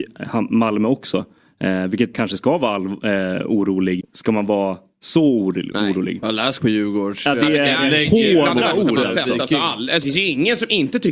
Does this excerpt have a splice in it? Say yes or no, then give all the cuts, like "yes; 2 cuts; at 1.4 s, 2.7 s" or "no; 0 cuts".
yes; 4 cuts; at 2.1 s, 4.0 s, 6.6 s, 10.0 s